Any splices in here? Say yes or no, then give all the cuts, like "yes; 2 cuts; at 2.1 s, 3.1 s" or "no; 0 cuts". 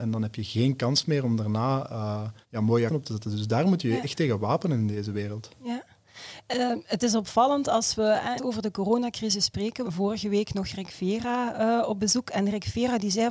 yes; 4 cuts; at 2.4 s, 2.9 s, 8.4 s, 9.8 s